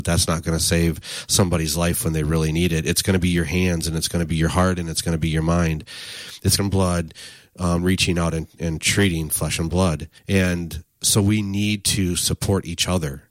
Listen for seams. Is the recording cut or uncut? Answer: cut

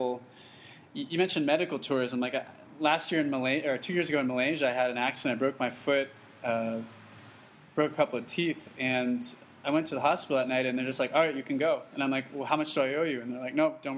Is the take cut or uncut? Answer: uncut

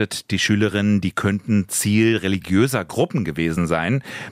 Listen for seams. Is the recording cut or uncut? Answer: uncut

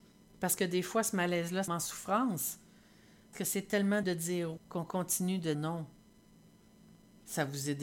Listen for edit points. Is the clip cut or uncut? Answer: cut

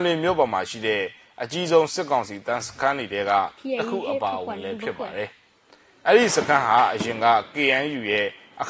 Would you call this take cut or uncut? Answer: uncut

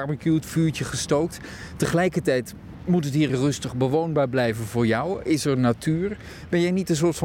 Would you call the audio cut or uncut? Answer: cut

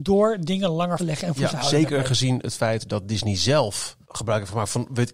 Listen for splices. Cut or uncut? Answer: cut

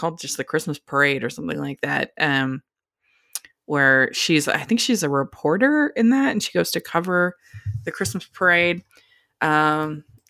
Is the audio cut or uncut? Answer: uncut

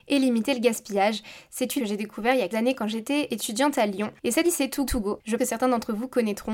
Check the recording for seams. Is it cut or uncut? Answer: cut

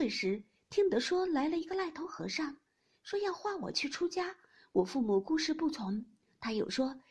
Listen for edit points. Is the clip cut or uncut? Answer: uncut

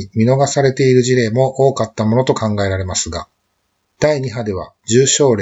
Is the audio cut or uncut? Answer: uncut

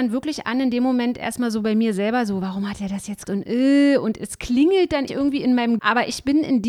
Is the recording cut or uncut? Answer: cut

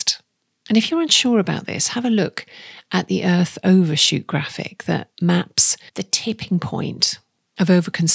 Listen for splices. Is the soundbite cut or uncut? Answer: cut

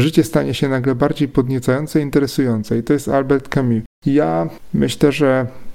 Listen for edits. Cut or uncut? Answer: cut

